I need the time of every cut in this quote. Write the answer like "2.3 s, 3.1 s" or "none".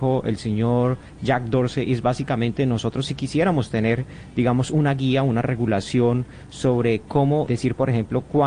7.5 s